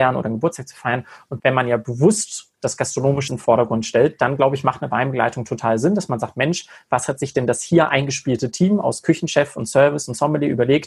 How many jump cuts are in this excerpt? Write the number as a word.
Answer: two